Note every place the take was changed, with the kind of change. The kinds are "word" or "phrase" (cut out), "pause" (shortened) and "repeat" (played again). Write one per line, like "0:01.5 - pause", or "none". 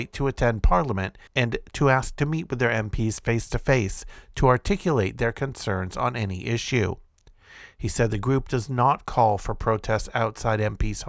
0:01.3 - pause